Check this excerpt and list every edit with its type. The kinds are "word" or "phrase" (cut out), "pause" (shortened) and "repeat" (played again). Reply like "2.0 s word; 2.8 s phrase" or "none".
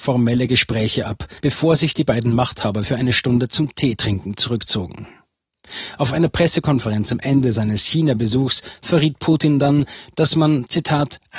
1.4 s pause